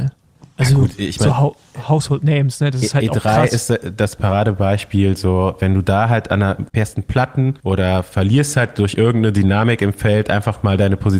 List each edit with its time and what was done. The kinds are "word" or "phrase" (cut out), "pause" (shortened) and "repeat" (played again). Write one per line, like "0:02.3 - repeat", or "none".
0:06.7 - pause
0:07.6 - pause